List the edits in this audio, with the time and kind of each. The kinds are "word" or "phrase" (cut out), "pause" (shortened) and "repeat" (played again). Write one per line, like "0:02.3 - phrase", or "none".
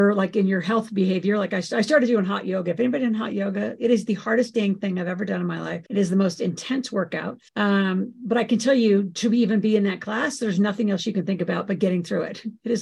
0:05.9 - pause
0:07.5 - pause